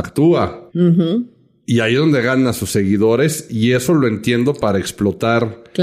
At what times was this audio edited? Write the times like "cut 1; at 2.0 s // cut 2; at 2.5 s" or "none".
none